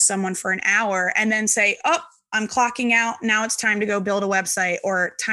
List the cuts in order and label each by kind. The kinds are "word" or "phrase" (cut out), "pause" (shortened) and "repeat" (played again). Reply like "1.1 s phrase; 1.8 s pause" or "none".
none